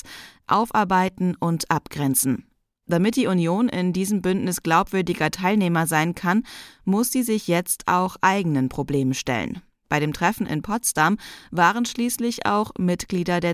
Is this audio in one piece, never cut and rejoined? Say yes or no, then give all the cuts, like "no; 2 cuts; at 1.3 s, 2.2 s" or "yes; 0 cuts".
yes; 0 cuts